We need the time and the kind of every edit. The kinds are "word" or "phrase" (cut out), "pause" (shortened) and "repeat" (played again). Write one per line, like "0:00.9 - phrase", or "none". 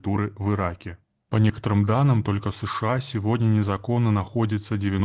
0:01.2 - pause